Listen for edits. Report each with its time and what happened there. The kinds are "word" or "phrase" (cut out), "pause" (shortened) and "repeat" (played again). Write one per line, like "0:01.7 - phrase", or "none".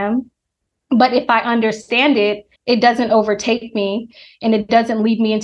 0:02.6 - pause